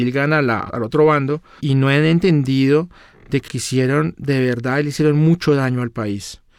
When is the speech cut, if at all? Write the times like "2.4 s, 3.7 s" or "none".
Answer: 3.5 s